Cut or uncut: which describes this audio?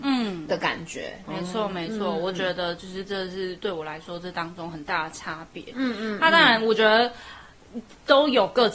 cut